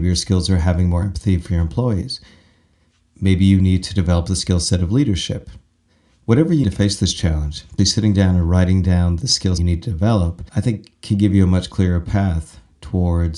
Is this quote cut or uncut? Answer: cut